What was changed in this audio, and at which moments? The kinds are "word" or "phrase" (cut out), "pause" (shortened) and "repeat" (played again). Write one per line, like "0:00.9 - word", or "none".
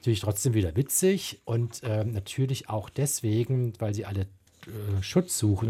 none